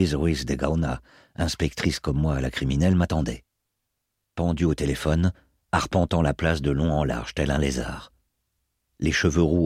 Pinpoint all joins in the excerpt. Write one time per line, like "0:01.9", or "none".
none